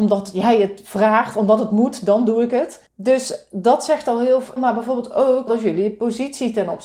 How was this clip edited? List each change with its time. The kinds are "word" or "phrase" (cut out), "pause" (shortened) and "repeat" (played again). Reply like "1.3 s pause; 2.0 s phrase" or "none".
2.9 s pause; 4.6 s word; 5.5 s word